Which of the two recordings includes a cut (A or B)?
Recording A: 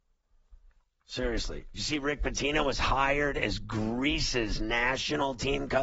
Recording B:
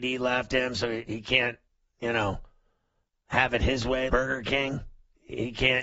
B